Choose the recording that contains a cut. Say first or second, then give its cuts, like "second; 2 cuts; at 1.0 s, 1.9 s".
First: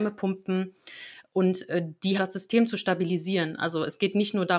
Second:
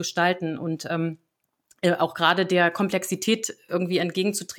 first; 1 cut; at 2.2 s